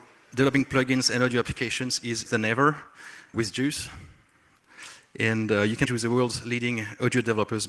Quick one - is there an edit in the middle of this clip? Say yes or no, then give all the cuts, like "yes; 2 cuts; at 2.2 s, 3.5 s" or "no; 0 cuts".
yes; 3 cuts; at 2.3 s, 3.3 s, 5.8 s